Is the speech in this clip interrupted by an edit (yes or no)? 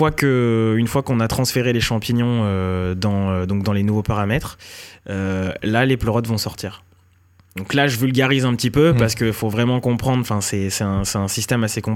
no